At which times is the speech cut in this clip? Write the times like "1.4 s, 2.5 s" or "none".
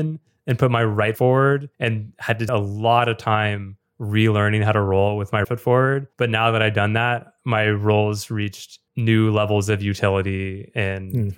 1.2 s, 1.7 s, 2.5 s, 5.4 s, 6.1 s, 7.4 s, 8.9 s